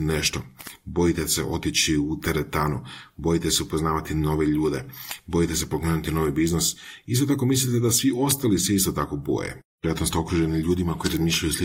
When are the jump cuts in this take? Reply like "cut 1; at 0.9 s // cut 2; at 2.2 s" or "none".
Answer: none